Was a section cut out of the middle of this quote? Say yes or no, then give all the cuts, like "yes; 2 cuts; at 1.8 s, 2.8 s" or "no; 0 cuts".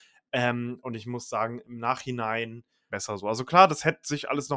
yes; 1 cut; at 2.9 s